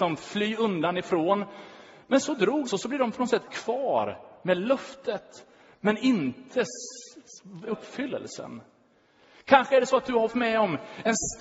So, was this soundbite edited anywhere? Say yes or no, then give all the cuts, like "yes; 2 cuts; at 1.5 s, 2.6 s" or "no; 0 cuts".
yes; 5 cuts; at 2.2 s, 2.7 s, 3.5 s, 7.7 s, 10.3 s